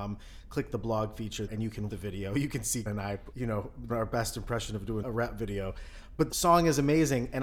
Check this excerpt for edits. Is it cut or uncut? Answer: cut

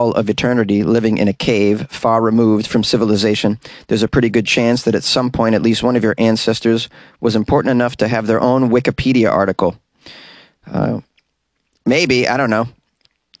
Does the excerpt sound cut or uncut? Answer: uncut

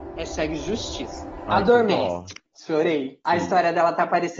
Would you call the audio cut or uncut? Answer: cut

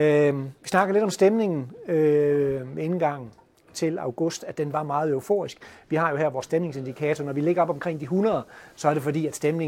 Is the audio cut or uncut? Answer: uncut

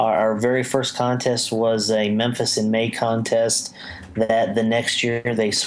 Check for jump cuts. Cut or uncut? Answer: uncut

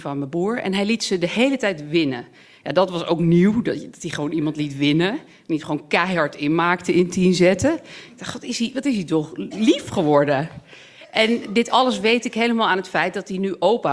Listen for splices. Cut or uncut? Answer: uncut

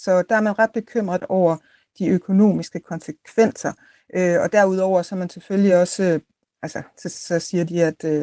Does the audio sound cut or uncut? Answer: uncut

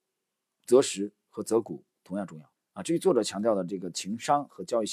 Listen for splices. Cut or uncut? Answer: cut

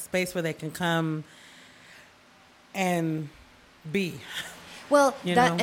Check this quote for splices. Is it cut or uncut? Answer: uncut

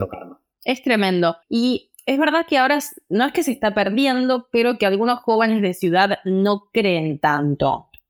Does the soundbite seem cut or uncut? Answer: cut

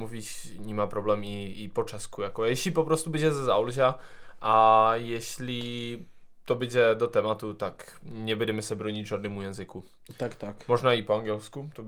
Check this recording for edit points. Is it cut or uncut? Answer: uncut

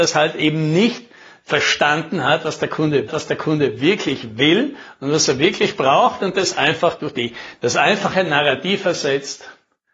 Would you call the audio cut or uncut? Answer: cut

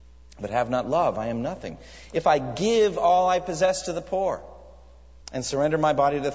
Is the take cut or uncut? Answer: cut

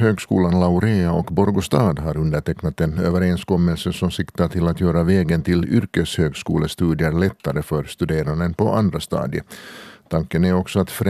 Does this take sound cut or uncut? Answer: uncut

